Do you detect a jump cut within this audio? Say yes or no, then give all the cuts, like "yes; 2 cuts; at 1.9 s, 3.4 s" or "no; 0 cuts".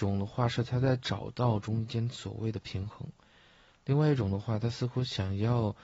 no; 0 cuts